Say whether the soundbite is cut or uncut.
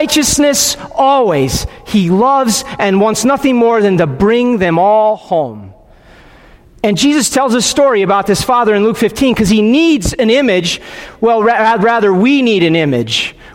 uncut